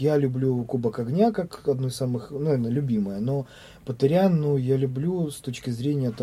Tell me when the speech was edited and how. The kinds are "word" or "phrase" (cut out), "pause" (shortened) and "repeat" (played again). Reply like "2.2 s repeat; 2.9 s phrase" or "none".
none